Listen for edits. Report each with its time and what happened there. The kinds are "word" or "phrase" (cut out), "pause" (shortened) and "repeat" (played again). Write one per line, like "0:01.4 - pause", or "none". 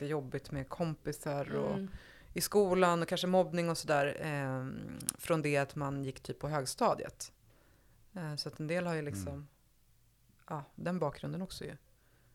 none